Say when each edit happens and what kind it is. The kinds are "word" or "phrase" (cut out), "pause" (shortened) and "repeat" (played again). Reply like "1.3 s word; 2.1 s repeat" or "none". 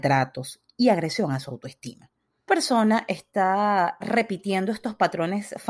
2.5 s word; 4.0 s word